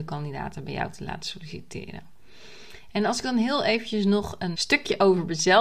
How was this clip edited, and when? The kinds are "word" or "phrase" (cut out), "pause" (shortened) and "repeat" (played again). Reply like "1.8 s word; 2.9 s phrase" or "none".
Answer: 4.5 s word